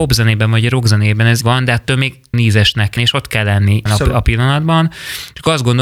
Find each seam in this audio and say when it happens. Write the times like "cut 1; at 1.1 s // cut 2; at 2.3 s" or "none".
cut 1; at 1.4 s // cut 2; at 2.3 s // cut 3; at 3.0 s // cut 4; at 3.9 s